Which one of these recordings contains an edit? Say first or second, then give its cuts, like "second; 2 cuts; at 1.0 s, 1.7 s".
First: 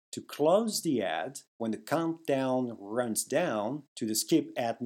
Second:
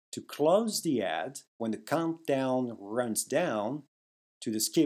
first; 1 cut; at 3.9 s